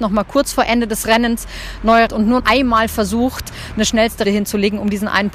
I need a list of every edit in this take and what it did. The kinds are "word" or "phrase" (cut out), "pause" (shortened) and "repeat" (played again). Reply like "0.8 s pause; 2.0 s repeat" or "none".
2.1 s phrase; 2.4 s word; 4.2 s word